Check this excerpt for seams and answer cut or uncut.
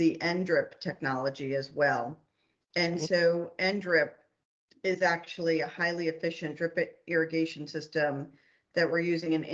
uncut